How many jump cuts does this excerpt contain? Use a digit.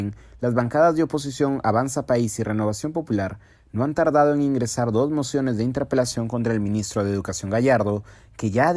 0